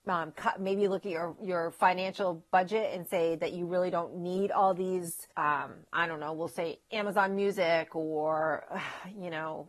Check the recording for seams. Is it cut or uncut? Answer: cut